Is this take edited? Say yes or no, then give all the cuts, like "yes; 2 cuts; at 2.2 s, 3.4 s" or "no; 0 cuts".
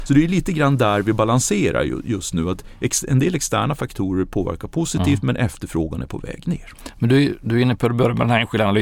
no; 0 cuts